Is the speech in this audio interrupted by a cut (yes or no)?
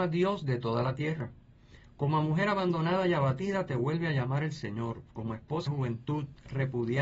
yes